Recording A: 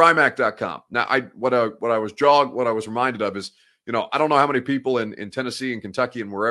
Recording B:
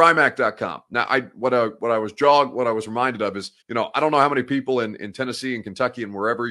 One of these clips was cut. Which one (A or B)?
B